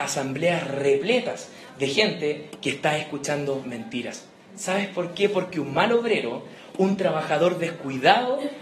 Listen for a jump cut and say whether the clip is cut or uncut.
uncut